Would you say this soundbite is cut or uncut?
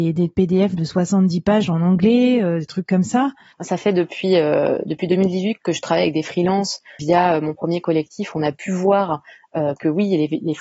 uncut